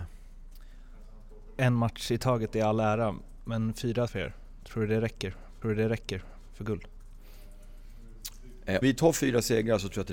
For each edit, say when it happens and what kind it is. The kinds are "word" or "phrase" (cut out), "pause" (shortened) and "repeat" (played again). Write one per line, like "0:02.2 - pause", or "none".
0:04.1 - phrase
0:05.6 - repeat
0:08.8 - word